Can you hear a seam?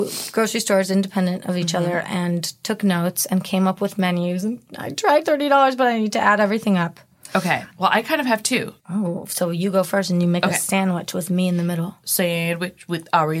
yes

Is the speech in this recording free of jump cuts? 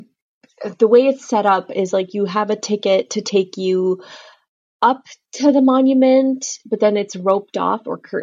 yes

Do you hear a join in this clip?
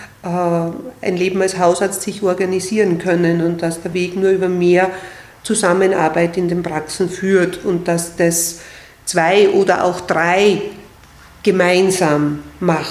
no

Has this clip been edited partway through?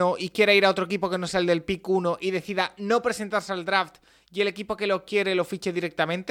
no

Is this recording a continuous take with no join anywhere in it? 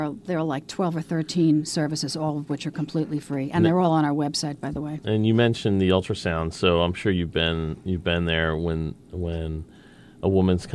yes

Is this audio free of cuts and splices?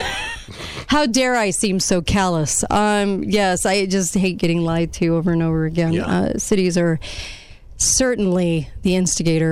yes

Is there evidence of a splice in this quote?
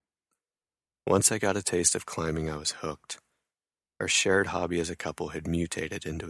no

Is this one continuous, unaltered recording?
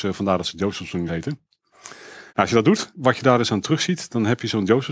no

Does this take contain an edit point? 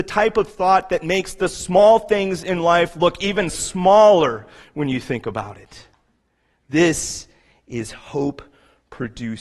no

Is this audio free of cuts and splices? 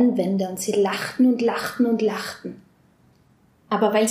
yes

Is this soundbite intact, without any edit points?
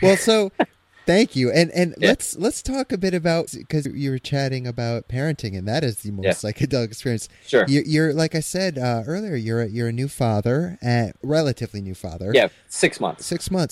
no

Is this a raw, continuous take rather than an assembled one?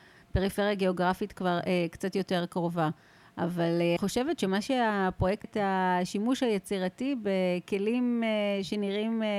no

